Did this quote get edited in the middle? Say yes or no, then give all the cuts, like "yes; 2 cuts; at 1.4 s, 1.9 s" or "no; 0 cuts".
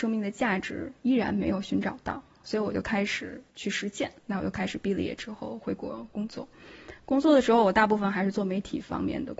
yes; 2 cuts; at 3.5 s, 4.2 s